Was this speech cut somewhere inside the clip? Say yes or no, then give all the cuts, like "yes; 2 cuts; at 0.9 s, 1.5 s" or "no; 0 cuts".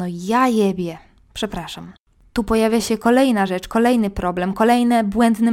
no; 0 cuts